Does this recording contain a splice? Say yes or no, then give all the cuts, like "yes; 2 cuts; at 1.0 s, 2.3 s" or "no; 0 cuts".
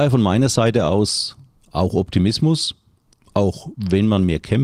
no; 0 cuts